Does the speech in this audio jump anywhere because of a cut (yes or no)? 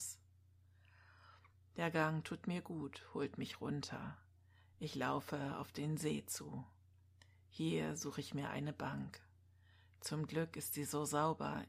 no